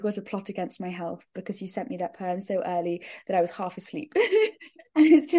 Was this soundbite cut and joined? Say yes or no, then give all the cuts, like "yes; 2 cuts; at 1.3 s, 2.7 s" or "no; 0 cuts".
no; 0 cuts